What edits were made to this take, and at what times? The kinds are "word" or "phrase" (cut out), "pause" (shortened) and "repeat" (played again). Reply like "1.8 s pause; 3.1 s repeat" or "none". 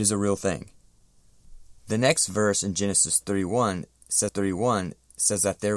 1.8 s pause; 4.3 s repeat